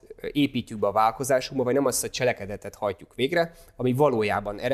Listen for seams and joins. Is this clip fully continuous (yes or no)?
yes